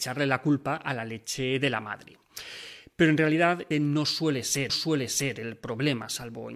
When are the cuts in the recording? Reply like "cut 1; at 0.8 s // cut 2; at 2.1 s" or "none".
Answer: cut 1; at 3.7 s // cut 2; at 4.7 s